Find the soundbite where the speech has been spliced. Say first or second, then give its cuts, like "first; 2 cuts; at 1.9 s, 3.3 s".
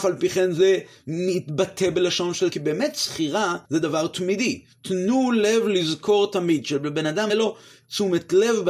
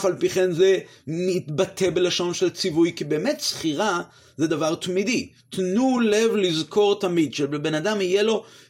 first; 3 cuts; at 2.5 s, 3.6 s, 7.3 s